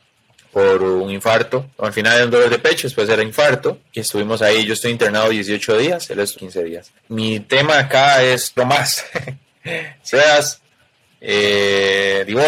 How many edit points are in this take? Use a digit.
6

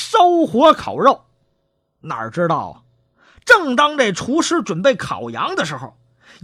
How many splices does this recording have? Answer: 0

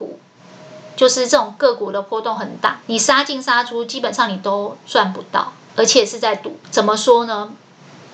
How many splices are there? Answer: 3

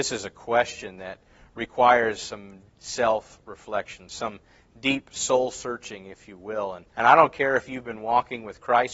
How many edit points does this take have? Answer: 2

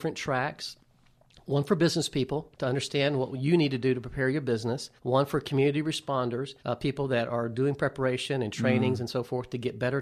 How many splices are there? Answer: 3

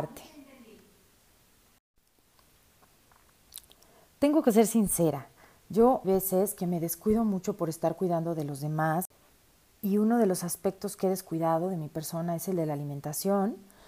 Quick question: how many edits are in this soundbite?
1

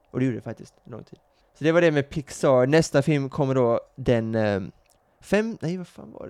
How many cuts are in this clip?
2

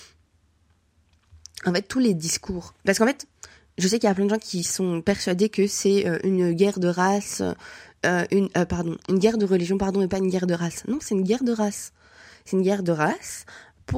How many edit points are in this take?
0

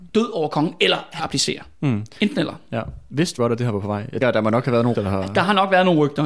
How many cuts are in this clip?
4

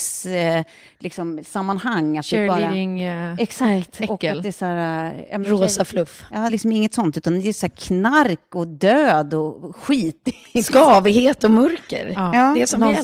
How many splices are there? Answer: 1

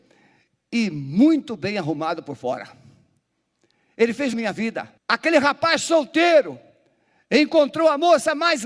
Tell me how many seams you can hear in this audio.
2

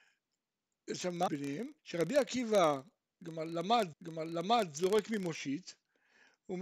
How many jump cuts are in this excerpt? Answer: 3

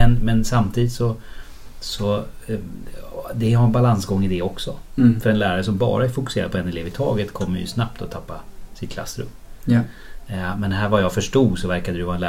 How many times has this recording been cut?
0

